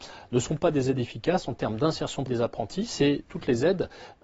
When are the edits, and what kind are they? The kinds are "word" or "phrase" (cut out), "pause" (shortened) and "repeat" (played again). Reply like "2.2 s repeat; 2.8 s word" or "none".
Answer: 2.3 s word